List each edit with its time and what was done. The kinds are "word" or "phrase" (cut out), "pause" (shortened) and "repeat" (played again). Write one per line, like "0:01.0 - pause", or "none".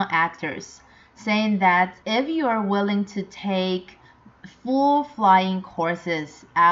0:02.0 - pause